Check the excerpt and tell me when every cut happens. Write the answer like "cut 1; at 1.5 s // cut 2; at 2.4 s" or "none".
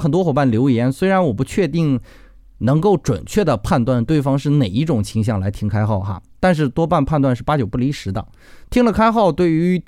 none